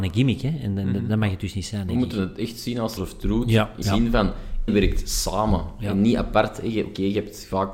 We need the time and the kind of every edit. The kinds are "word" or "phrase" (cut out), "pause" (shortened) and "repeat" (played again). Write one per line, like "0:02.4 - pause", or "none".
0:03.0 - phrase
0:03.8 - word
0:04.7 - word